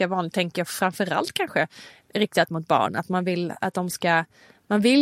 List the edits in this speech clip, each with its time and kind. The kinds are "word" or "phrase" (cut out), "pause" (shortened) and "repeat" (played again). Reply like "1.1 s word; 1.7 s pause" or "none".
none